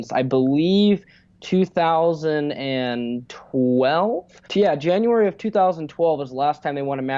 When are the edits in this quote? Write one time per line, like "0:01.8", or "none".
0:04.4